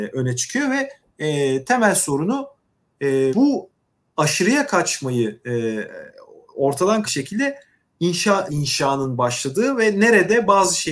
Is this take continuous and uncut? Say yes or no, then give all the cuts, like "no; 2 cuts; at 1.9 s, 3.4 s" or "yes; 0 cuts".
no; 3 cuts; at 3.3 s, 7.0 s, 8.5 s